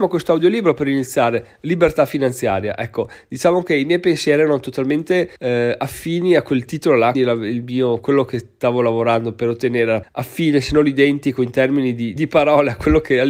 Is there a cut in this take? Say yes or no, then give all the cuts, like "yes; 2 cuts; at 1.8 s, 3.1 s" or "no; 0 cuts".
yes; 4 cuts; at 5.4 s, 7.1 s, 10.0 s, 12.2 s